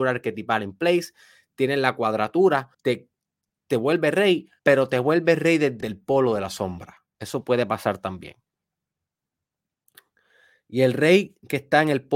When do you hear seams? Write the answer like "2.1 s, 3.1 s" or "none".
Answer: 2.7 s, 4.6 s, 5.8 s